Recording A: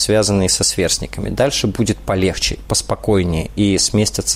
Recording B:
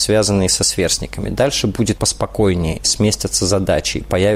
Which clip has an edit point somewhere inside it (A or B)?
B